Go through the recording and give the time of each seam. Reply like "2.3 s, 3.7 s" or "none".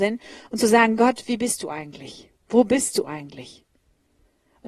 none